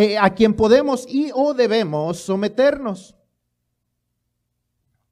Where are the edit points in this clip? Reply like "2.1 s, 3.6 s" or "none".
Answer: none